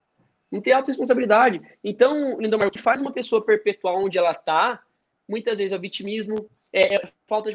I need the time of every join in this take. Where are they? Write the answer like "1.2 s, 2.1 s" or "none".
none